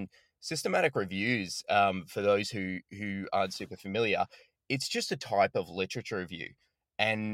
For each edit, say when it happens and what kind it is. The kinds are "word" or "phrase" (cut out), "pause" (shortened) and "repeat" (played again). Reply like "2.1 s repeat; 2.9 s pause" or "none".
none